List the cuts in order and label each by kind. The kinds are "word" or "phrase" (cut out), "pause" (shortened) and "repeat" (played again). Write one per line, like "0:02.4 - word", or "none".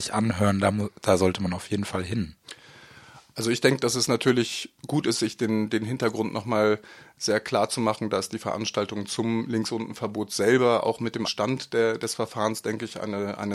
0:04.8 - pause
0:11.2 - word